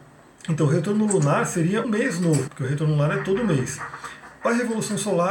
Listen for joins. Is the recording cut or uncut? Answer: cut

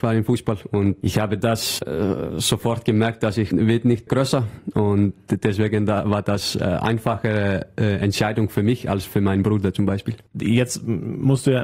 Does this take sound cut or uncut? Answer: cut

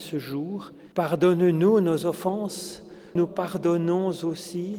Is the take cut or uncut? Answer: cut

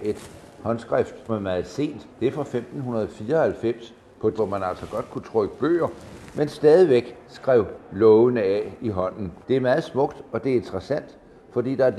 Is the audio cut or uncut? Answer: cut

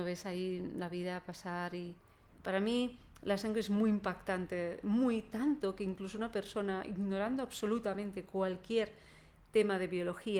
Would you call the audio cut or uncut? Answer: uncut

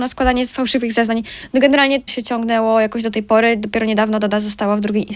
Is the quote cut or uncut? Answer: cut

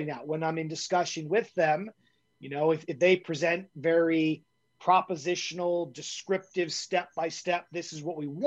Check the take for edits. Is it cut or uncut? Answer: uncut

